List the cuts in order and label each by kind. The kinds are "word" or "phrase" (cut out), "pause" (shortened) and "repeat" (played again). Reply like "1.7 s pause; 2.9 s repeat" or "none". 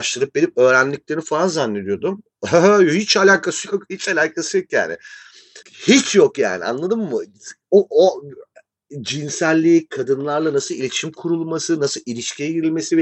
5.6 s pause